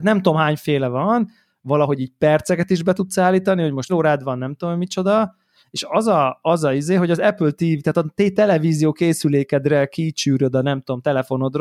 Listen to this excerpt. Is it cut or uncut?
cut